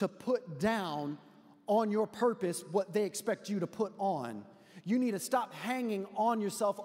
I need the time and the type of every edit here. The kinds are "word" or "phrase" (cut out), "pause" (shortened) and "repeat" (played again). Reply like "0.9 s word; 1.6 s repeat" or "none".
none